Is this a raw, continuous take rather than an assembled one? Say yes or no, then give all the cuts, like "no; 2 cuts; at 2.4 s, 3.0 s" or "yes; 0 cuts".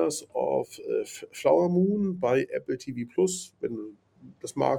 yes; 0 cuts